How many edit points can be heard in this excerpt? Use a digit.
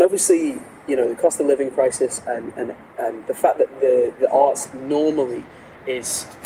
0